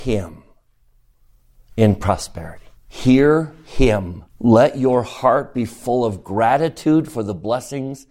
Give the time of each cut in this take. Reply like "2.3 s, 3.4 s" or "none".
2.8 s, 4.3 s